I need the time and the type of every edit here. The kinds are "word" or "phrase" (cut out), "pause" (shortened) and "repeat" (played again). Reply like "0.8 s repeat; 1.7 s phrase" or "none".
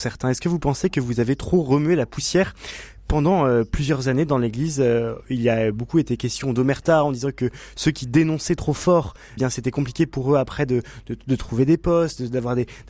9.4 s word

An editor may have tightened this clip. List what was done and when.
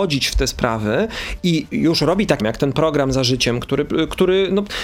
2.4 s phrase

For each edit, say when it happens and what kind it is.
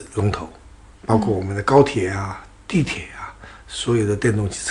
none

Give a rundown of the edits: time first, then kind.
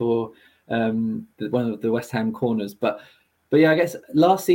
none

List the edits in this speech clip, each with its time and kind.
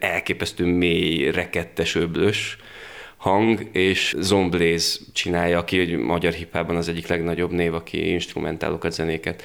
4.1 s word

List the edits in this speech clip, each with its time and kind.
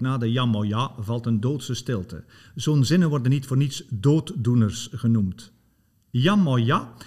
none

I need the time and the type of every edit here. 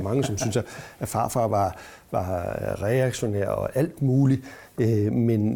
none

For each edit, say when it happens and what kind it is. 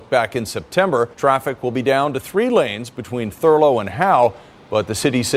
1.1 s pause

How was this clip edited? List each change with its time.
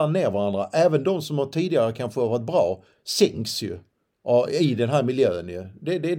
none

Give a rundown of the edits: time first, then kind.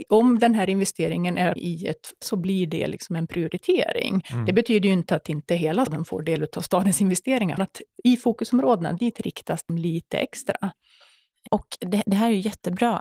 1.6 s phrase; 2.2 s word; 5.9 s word; 7.6 s phrase; 9.7 s word

